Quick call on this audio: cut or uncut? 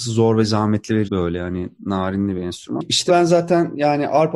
cut